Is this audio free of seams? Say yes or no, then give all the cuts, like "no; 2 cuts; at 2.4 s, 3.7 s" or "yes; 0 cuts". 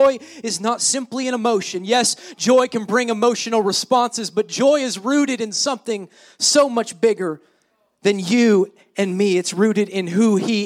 yes; 0 cuts